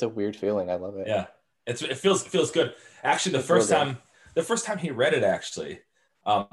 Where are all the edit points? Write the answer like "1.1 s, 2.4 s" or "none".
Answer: none